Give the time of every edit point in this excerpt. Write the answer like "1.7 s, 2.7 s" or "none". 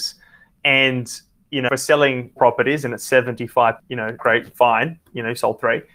1.7 s, 2.4 s, 3.8 s, 4.2 s